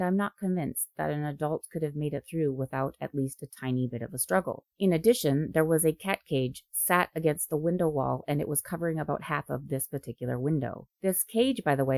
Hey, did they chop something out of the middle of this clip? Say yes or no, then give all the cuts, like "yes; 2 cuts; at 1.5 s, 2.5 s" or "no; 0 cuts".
yes; 2 cuts; at 4.7 s, 10.9 s